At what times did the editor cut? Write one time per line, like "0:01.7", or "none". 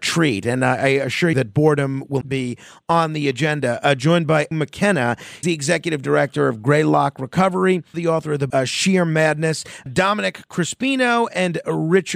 0:01.3
0:02.2
0:04.5
0:05.4
0:07.9
0:08.5
0:09.9